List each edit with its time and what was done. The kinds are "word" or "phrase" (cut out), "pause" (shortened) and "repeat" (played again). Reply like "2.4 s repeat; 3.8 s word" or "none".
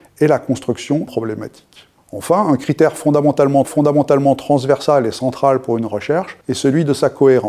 1.1 s word; 3.6 s repeat; 6.4 s pause